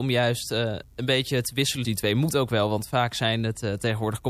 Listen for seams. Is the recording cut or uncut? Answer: cut